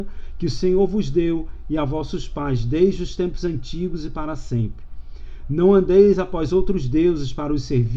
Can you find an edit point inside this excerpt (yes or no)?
no